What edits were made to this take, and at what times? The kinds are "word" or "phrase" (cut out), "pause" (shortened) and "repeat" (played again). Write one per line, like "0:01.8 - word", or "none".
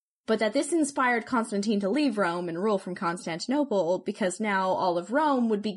none

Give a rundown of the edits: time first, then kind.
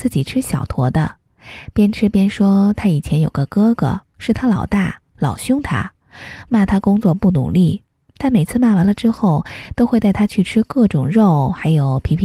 none

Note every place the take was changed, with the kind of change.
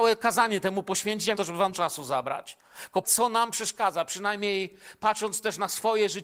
0:01.4 - phrase
0:01.7 - word
0:03.0 - word

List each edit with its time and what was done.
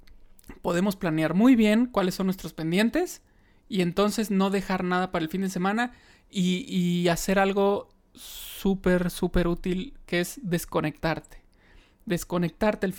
none

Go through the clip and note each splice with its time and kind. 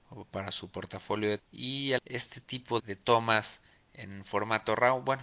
0:01.4 - word
0:02.0 - word
0:02.8 - word

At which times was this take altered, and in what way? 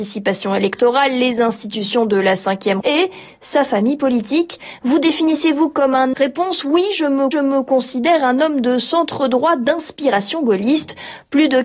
0:02.8 - word
0:06.1 - phrase
0:07.3 - repeat

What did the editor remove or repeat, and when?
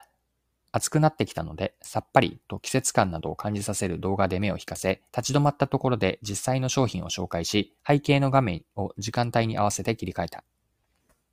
0:05.1 - pause
0:07.8 - pause

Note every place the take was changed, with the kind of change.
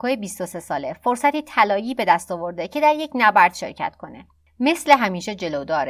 none

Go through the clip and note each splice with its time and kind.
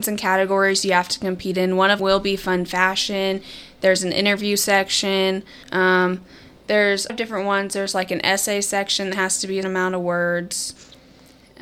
0:02.0 - word
0:05.6 - pause
0:07.1 - phrase
0:09.6 - word

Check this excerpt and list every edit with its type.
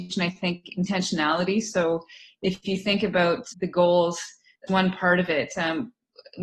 0:03.5 - word
0:04.7 - word

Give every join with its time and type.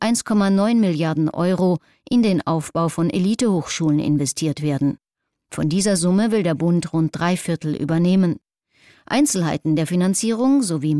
none

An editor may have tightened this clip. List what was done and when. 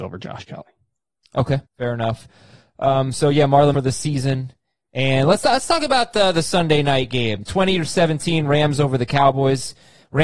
0:01.7 - pause
0:03.7 - phrase

